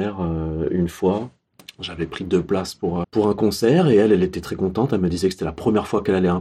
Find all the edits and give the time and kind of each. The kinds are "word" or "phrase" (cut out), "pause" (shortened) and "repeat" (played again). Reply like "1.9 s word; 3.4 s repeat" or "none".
3.0 s word